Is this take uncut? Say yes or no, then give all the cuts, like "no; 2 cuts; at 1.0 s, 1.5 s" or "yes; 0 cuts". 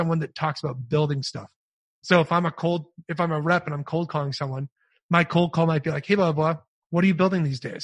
yes; 0 cuts